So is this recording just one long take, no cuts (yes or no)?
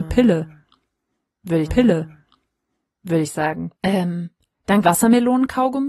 no